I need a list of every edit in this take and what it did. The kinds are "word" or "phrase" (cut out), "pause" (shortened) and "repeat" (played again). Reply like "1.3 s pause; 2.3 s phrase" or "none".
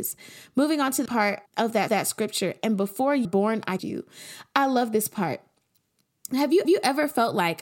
1.1 s word; 1.5 s word; 1.9 s repeat; 3.2 s word; 3.8 s word; 6.6 s repeat